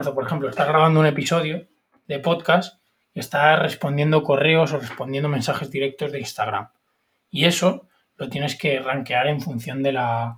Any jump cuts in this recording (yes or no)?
no